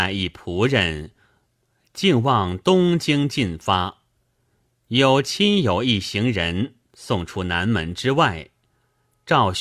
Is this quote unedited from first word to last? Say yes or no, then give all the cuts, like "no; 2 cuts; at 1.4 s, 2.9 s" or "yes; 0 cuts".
yes; 0 cuts